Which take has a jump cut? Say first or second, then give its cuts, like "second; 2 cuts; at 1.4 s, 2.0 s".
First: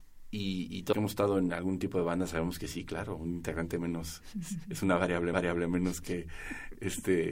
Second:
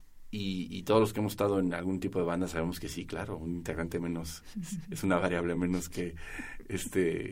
first; 2 cuts; at 0.9 s, 5.3 s